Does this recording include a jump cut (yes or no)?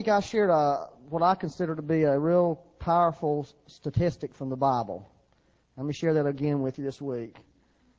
no